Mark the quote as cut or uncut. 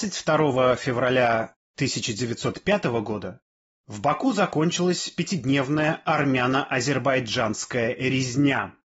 uncut